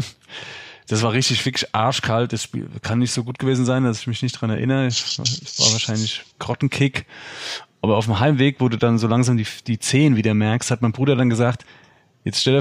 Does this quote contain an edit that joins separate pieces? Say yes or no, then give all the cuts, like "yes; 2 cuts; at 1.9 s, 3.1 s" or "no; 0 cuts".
yes; 1 cut; at 6.3 s